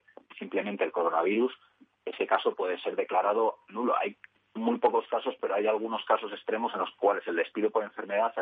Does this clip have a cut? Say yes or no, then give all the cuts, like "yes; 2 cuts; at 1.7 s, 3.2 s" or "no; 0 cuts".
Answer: no; 0 cuts